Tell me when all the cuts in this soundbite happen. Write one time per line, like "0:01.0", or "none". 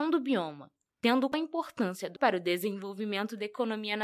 0:02.2